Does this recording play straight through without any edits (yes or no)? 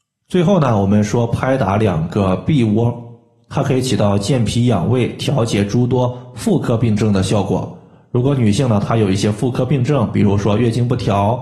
yes